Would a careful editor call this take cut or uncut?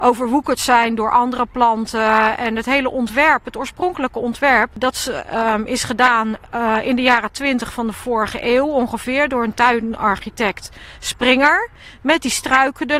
uncut